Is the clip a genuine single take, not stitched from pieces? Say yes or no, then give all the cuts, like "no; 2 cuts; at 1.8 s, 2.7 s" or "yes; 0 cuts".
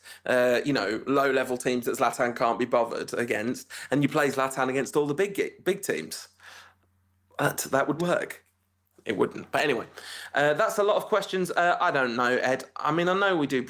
no; 1 cut; at 8.0 s